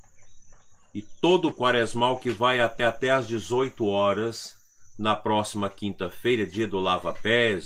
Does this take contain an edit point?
yes; 2 cuts; at 1.5 s, 2.8 s

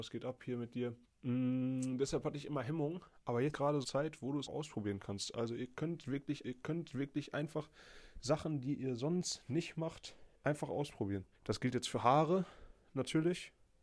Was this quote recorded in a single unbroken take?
no; 7 cuts; at 1.0 s, 3.5 s, 3.8 s, 4.5 s, 6.4 s, 10.3 s, 11.3 s

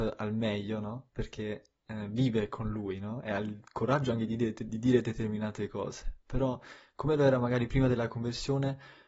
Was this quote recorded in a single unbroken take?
yes; 0 cuts

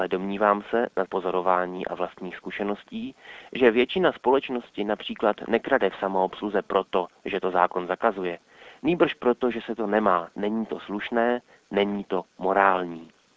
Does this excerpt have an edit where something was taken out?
yes; 1 cut; at 1.1 s

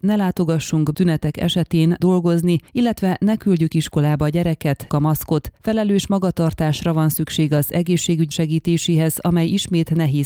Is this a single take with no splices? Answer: no; 5 cuts; at 0.9 s, 2.0 s, 2.7 s, 4.9 s, 8.3 s

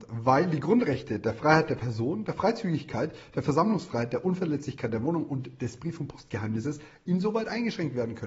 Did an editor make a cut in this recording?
no; 0 cuts

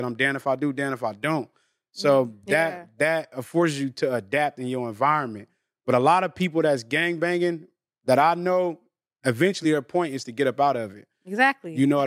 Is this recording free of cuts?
yes; 0 cuts

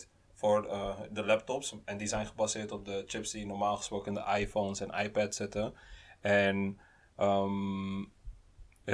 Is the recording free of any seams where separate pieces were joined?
yes; 0 cuts

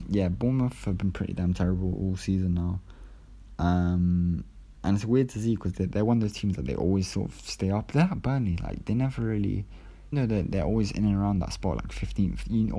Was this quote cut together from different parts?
yes; 1 cut; at 10.1 s

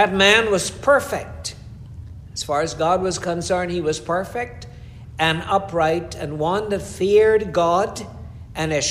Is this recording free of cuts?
yes; 0 cuts

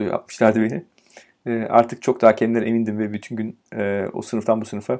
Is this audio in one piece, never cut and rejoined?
yes; 0 cuts

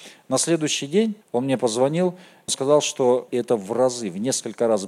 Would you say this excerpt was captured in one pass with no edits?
no; 3 cuts; at 1.2 s, 2.5 s, 3.3 s

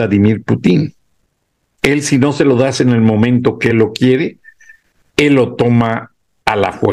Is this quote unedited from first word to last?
yes; 0 cuts

